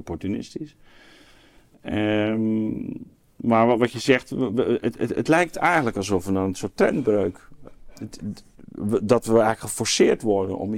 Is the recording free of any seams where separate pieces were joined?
yes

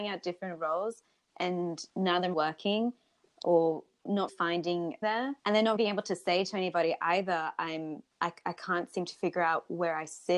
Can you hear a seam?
yes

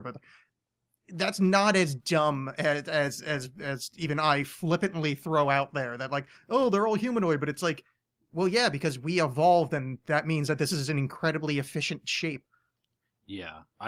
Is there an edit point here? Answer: no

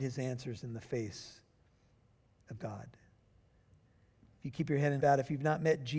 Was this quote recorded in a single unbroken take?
no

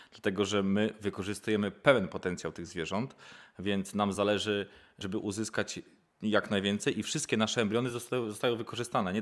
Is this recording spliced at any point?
no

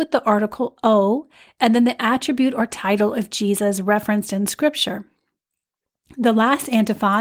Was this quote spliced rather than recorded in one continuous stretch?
no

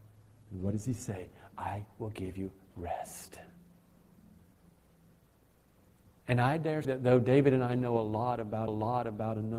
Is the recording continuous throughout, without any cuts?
no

